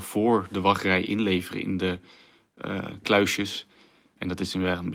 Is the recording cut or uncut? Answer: uncut